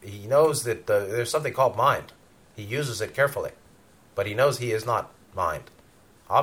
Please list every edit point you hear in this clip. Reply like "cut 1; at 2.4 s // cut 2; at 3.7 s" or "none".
none